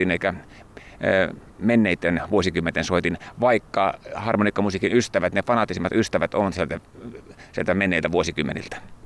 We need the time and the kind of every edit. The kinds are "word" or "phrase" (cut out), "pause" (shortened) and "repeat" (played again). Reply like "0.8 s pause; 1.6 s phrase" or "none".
none